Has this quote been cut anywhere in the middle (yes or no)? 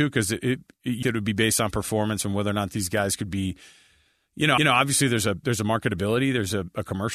yes